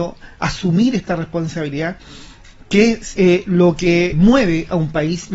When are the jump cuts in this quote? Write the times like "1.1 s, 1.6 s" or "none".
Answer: 3.2 s, 4.1 s